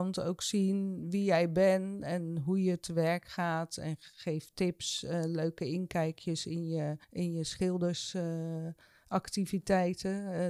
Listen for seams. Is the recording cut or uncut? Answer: cut